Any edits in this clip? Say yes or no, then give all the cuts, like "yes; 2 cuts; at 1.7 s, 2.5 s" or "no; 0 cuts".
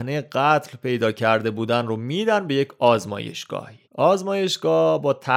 yes; 1 cut; at 3.8 s